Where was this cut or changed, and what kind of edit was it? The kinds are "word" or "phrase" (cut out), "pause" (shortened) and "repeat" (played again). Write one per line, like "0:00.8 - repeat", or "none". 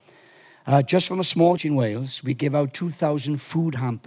0:01.6 - word